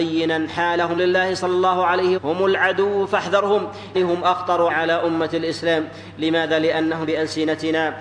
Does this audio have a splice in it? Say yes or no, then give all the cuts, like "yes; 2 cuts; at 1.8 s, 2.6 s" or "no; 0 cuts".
yes; 5 cuts; at 1.0 s, 2.2 s, 3.9 s, 4.7 s, 7.0 s